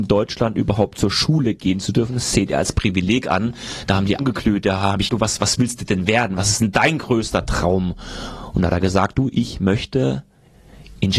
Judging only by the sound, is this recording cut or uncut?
cut